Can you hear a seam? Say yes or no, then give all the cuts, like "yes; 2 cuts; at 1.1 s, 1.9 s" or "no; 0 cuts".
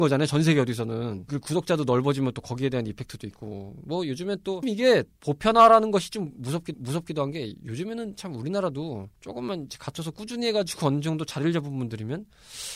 yes; 3 cuts; at 4.6 s, 6.7 s, 9.2 s